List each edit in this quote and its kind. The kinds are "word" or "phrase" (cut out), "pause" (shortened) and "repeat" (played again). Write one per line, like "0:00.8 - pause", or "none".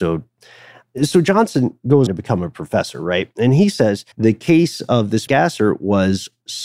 0:02.1 - word
0:04.1 - pause
0:05.3 - word